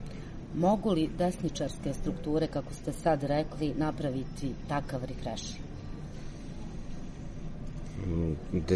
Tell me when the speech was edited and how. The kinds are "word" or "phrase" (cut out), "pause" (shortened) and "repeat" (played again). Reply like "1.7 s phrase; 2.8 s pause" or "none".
none